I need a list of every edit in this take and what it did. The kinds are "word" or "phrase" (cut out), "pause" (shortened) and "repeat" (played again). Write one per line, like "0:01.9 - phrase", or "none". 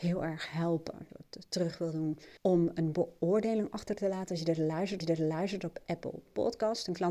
0:01.1 - word
0:02.4 - pause
0:05.0 - repeat